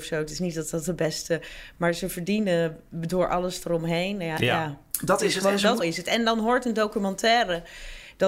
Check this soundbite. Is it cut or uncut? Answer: cut